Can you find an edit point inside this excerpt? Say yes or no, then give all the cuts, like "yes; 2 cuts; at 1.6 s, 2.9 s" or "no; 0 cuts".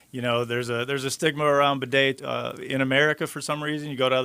yes; 1 cut; at 2.2 s